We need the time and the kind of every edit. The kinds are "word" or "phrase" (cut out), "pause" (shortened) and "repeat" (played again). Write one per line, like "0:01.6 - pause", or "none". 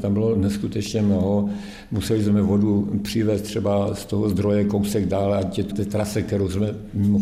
0:05.7 - word